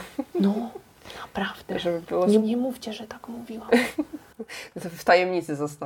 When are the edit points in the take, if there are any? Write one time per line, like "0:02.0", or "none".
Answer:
0:02.4